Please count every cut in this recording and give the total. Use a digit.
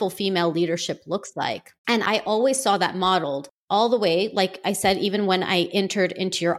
1